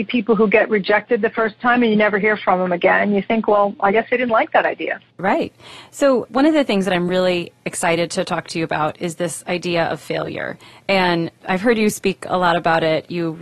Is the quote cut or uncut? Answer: uncut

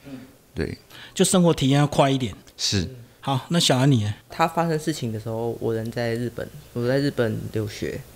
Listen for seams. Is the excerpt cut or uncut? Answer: cut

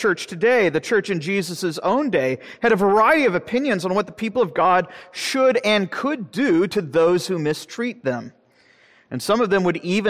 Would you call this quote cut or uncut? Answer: uncut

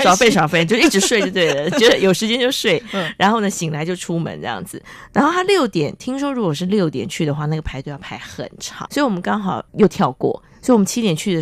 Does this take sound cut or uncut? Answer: cut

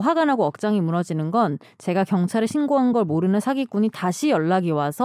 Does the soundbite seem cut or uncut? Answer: uncut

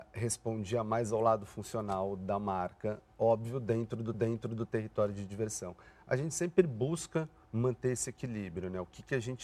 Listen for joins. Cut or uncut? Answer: cut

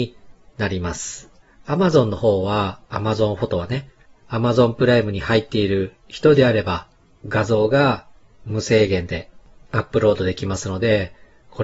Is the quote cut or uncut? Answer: uncut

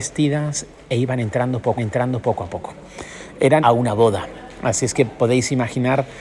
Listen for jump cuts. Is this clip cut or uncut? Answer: cut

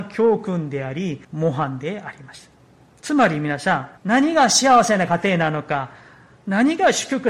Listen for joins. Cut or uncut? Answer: cut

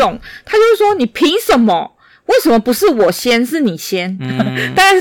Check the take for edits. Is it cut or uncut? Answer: uncut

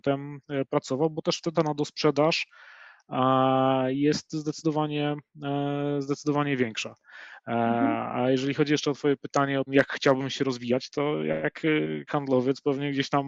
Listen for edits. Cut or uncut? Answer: cut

